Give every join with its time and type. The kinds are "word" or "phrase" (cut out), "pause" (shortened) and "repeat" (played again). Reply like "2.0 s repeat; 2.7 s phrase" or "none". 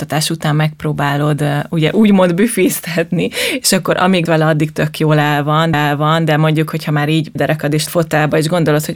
4.3 s word; 5.7 s repeat; 7.4 s phrase; 7.9 s phrase